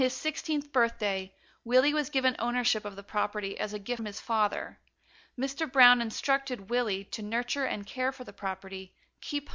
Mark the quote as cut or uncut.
cut